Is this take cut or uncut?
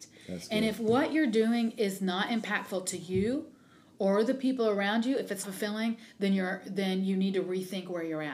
cut